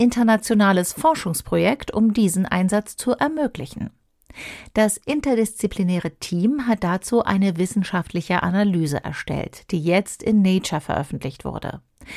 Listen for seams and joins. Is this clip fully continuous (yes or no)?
yes